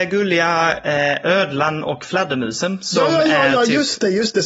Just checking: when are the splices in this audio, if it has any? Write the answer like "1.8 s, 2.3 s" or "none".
none